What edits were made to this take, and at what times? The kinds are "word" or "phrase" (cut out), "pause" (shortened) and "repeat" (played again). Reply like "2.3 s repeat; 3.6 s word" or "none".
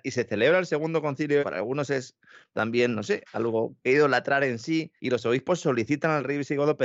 1.4 s phrase; 5.0 s pause